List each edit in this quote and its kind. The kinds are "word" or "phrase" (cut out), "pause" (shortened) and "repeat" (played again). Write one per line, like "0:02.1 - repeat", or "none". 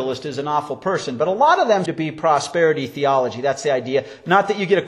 0:01.9 - word

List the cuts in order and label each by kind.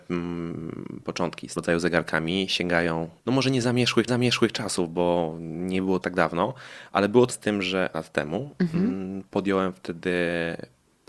0:01.6 - word
0:03.2 - pause
0:04.1 - repeat
0:06.0 - word
0:07.3 - word
0:07.9 - word

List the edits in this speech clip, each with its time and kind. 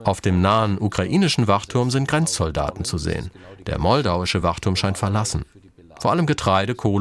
none

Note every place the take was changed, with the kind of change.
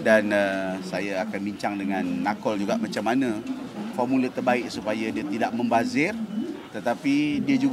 0:03.9 - word

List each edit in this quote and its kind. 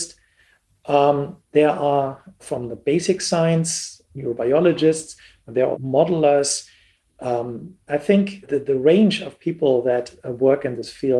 0:01.4 - pause
0:02.4 - word
0:04.1 - pause
0:05.7 - word
0:07.9 - word
0:08.4 - word

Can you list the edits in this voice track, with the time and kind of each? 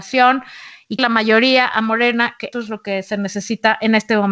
0:01.0 - word
0:02.5 - word

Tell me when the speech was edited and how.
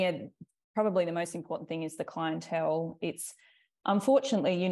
none

